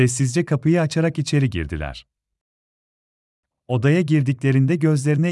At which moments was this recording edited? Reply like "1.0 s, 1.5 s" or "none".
none